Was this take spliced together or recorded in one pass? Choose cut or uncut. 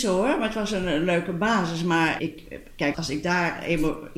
cut